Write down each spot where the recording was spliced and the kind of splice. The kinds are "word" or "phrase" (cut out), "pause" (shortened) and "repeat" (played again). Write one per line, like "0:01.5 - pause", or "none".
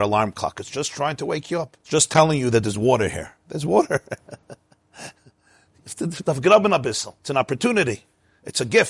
0:01.8 - pause
0:07.2 - pause